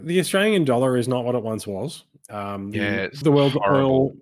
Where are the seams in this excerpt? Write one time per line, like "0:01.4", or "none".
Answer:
0:03.2